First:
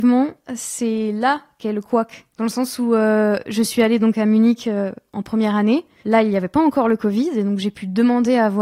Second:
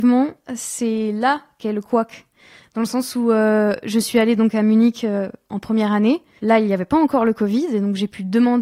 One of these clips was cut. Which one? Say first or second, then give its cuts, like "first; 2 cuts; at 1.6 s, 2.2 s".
first; 1 cut; at 2.3 s